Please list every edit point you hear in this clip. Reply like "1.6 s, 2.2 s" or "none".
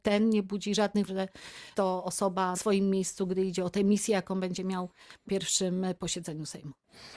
1.1 s, 1.7 s, 2.5 s, 5.3 s